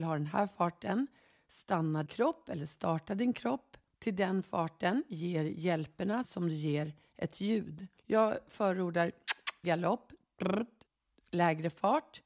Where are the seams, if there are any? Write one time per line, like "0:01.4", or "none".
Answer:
0:02.1
0:03.9
0:06.2
0:08.0
0:09.6